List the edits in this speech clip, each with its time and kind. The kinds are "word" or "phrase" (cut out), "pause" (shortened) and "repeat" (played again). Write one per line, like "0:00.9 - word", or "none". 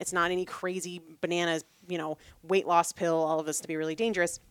0:02.3 - pause
0:03.6 - phrase